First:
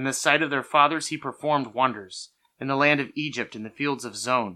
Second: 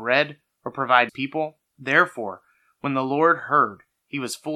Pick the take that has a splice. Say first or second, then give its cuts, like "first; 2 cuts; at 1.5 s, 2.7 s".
second; 2 cuts; at 1.1 s, 1.7 s